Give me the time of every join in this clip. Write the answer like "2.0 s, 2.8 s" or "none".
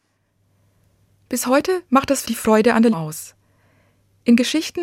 2.2 s, 2.9 s